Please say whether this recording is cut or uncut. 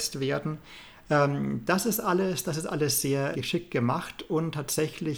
cut